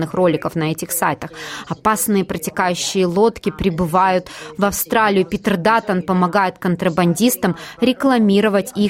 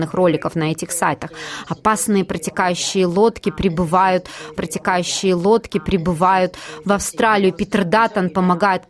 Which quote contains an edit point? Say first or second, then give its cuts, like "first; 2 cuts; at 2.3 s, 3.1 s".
second; 1 cut; at 4.5 s